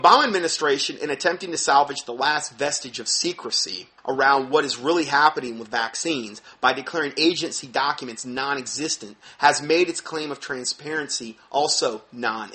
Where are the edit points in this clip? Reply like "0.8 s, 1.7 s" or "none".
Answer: 4.0 s